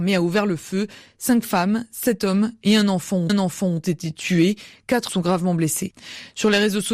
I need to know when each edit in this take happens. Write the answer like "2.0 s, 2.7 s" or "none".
3.3 s, 5.1 s

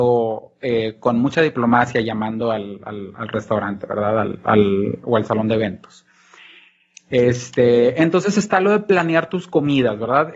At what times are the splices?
none

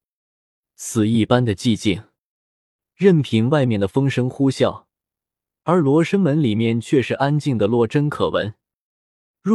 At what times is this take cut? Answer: none

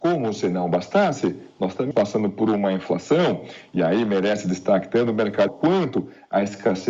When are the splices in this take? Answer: 1.9 s, 5.5 s

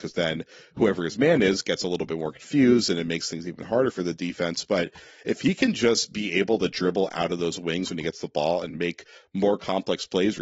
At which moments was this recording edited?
none

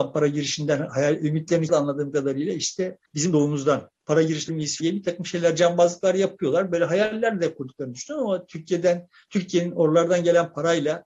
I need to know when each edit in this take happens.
1.7 s, 3.1 s, 4.0 s, 4.5 s, 4.8 s

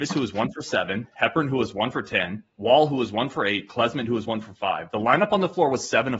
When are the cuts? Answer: 2.5 s

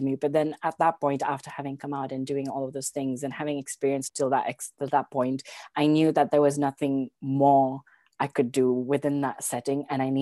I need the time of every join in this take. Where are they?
4.1 s

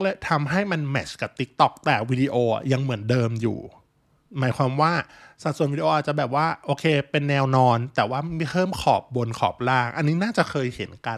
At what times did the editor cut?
none

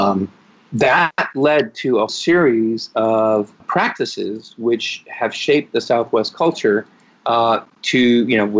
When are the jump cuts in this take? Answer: 2.1 s, 3.6 s

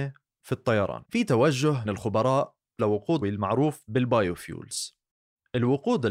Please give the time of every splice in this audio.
1.0 s, 1.8 s, 2.8 s, 3.2 s

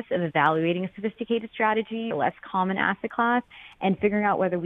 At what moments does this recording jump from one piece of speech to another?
2.1 s

